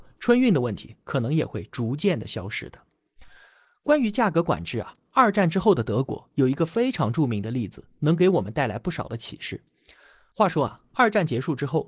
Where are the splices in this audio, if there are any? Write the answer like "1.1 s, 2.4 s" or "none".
none